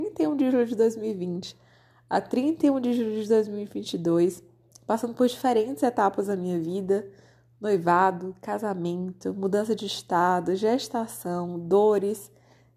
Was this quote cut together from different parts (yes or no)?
no